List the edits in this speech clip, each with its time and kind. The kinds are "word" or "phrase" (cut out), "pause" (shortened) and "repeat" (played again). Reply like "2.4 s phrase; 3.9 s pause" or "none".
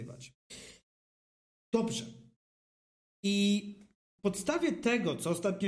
4.2 s word